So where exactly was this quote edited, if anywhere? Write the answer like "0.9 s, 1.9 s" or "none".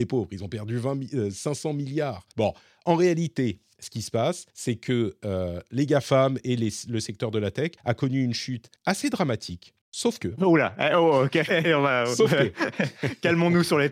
2.3 s, 4.5 s, 7.8 s, 8.8 s, 9.8 s